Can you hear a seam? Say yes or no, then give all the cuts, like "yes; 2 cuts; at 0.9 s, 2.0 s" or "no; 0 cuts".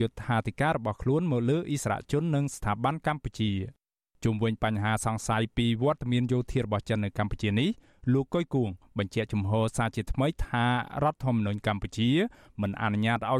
no; 0 cuts